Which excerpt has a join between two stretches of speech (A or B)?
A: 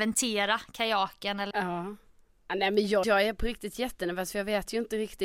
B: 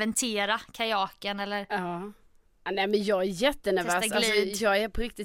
A